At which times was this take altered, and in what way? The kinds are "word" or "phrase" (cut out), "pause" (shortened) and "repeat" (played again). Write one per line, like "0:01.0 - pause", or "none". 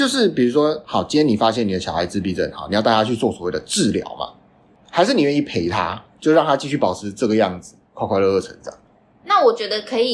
none